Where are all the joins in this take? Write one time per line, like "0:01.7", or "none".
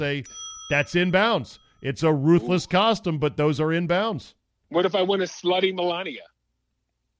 none